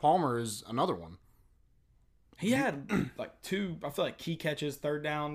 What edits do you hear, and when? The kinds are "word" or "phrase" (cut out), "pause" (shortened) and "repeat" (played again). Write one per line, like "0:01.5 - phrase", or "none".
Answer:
none